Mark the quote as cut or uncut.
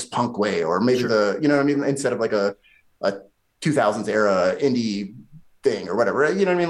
uncut